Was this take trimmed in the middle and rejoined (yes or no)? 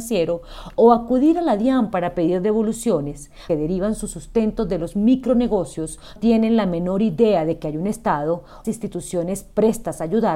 yes